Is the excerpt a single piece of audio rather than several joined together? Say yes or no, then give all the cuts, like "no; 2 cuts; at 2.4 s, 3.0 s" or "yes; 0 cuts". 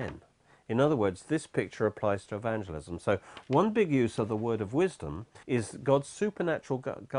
no; 1 cut; at 5.4 s